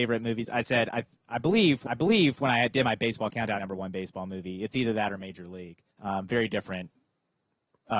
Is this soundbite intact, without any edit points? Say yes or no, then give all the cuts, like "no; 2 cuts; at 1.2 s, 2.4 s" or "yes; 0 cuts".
no; 3 cuts; at 1.9 s, 3.6 s, 5.9 s